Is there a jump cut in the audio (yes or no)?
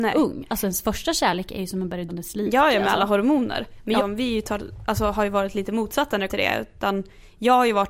yes